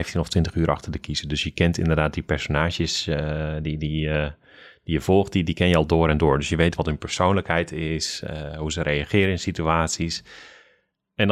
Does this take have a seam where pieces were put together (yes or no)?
no